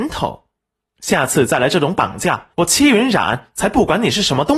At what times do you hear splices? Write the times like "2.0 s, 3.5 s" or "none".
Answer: 2.5 s